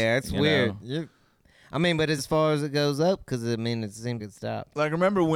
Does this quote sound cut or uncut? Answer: cut